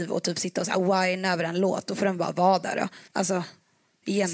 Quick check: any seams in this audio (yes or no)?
yes